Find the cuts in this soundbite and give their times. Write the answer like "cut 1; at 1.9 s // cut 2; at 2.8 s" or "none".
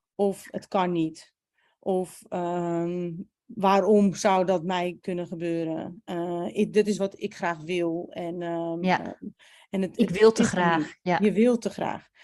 none

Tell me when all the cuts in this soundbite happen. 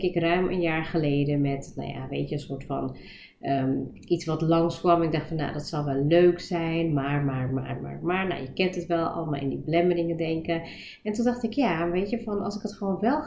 none

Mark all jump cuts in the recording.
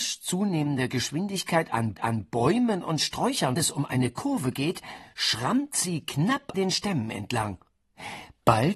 cut 1; at 2.0 s // cut 2; at 3.6 s // cut 3; at 6.5 s

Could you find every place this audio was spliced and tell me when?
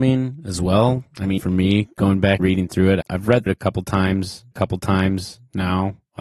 cut 1; at 1.4 s // cut 2; at 2.4 s // cut 3; at 3.0 s // cut 4; at 3.5 s // cut 5; at 4.5 s

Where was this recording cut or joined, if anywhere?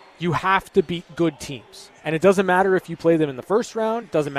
cut 1; at 2.0 s

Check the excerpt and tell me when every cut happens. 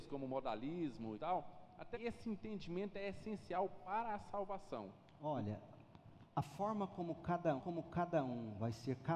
cut 1; at 1.1 s // cut 2; at 1.9 s // cut 3; at 6.3 s // cut 4; at 7.6 s

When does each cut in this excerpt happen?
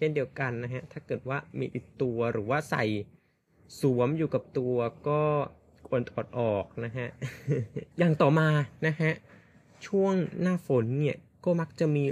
cut 1; at 7.9 s

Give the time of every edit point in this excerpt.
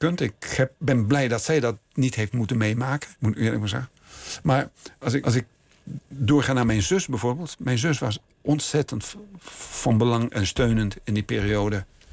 cut 1; at 3.2 s // cut 2; at 5.2 s // cut 3; at 8.3 s

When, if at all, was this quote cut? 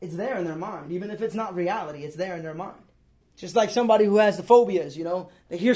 cut 1; at 3.2 s

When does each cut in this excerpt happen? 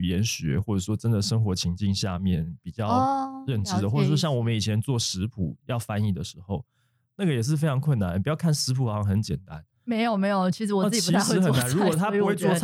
none

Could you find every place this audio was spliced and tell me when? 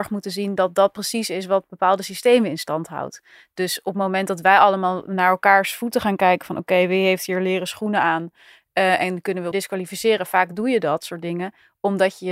cut 1; at 9.5 s

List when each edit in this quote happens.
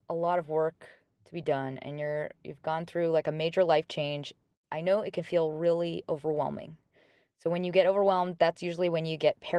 none

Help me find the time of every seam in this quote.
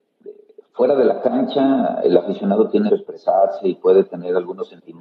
cut 1; at 2.9 s

